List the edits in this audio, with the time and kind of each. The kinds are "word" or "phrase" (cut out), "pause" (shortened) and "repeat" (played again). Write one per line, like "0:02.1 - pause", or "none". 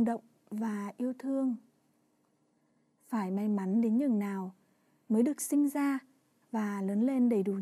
none